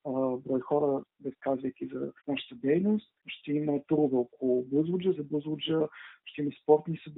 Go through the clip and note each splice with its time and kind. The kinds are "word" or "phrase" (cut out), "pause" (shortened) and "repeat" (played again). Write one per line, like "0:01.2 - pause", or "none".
0:01.1 - pause
0:02.2 - pause
0:03.2 - pause
0:05.1 - phrase